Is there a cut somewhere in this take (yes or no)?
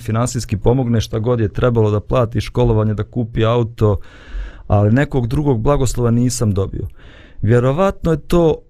no